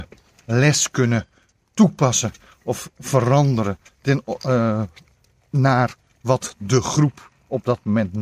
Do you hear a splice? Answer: no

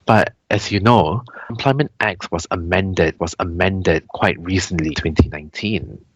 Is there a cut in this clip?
yes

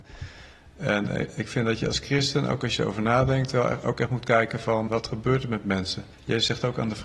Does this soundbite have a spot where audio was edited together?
yes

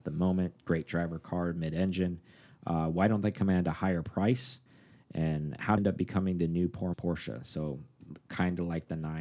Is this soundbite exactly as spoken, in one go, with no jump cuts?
no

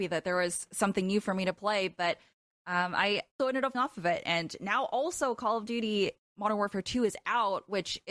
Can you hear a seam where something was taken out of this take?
yes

